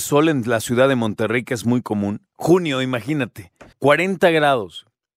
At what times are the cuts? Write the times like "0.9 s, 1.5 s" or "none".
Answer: 3.7 s